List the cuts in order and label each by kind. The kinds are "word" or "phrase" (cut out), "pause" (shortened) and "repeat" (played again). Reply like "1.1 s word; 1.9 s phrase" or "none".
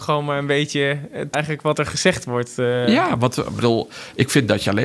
1.3 s word

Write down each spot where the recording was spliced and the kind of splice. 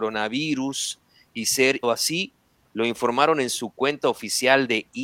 1.8 s word

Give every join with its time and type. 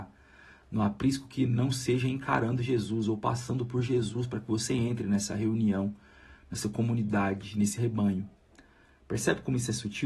none

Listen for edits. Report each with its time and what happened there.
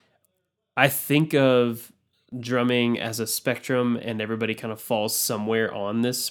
none

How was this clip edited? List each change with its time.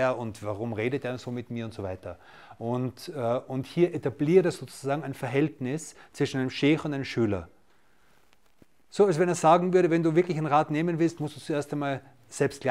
none

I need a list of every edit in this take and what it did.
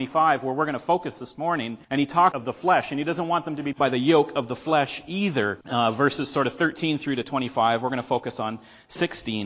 1.8 s pause; 2.3 s phrase; 3.7 s word; 5.6 s pause

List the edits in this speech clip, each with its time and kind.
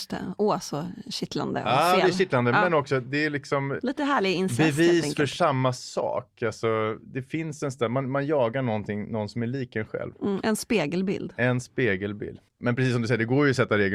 12.5 s pause

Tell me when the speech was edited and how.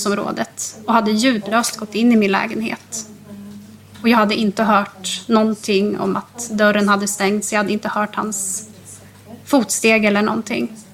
none

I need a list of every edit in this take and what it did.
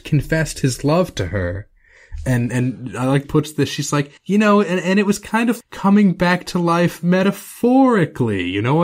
3.2 s phrase; 4.2 s pause; 5.6 s word

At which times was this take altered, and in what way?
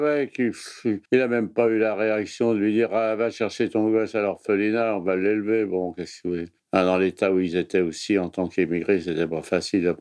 1.0 s pause; 6.6 s pause

